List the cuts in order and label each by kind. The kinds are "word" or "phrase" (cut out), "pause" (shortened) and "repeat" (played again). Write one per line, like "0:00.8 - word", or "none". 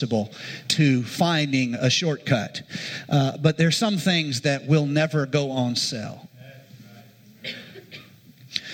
none